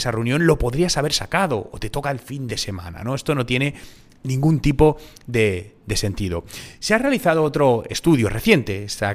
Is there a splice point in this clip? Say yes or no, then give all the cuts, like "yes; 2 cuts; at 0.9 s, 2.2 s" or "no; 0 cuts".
no; 0 cuts